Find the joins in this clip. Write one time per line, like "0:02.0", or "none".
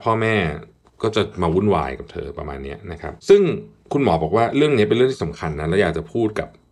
0:03.2